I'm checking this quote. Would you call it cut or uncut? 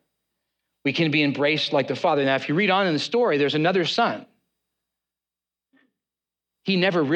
uncut